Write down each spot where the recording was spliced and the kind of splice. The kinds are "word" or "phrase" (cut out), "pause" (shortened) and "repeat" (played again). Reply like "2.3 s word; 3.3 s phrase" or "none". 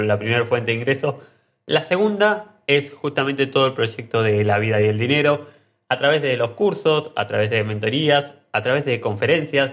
none